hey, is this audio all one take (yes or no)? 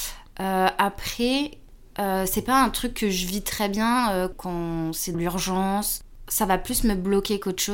no